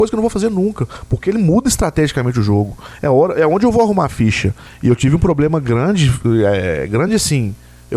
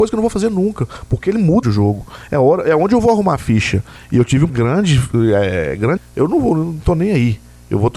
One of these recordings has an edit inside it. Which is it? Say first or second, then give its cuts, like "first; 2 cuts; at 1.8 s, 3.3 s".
second; 3 cuts; at 1.6 s, 4.5 s, 6.0 s